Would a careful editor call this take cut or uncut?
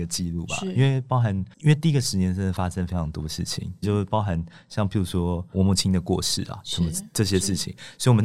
cut